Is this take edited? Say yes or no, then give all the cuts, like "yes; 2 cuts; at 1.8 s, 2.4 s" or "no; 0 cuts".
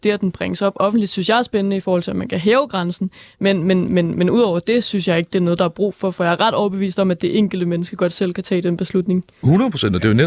no; 0 cuts